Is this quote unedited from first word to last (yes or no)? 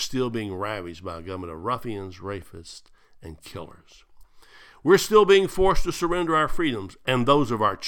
yes